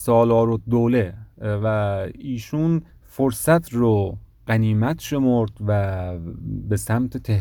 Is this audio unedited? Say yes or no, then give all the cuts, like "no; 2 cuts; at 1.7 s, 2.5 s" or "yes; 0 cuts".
no; 1 cut; at 2.9 s